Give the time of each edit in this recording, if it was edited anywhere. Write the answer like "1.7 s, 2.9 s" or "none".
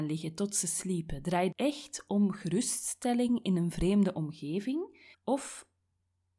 1.5 s, 5.1 s